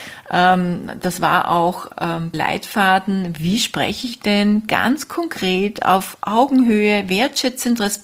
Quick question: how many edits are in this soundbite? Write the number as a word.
one